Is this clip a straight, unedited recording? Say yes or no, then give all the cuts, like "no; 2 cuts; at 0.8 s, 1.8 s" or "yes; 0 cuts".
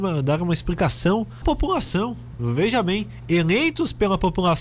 no; 1 cut; at 1.4 s